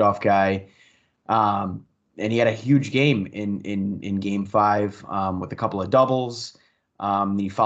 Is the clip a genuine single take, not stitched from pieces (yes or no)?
yes